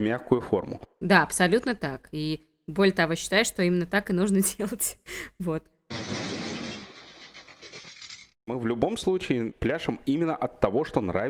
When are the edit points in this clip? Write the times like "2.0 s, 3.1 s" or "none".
0.9 s